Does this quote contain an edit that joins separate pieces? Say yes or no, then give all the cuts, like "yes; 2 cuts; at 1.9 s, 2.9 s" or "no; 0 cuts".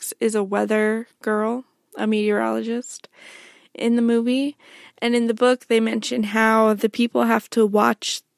no; 0 cuts